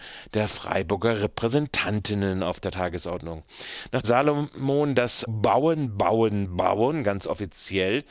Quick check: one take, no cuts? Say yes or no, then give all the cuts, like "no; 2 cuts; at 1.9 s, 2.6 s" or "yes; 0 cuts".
no; 2 cuts; at 4.0 s, 5.3 s